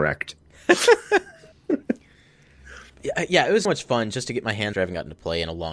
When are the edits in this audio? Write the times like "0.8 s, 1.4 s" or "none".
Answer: 2.9 s, 3.6 s, 4.7 s